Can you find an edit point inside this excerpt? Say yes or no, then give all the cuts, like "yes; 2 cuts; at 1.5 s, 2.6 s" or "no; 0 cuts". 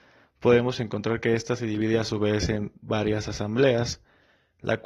no; 0 cuts